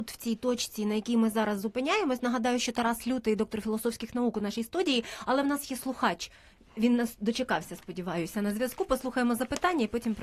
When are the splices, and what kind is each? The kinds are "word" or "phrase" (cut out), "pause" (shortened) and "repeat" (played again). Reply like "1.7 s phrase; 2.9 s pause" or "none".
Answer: none